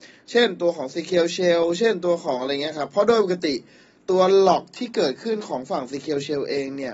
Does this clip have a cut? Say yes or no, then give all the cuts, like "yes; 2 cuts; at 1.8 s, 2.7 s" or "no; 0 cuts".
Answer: no; 0 cuts